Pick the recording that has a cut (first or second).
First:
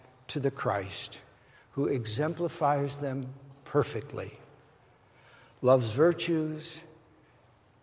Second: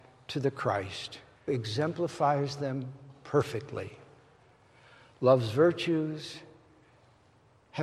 second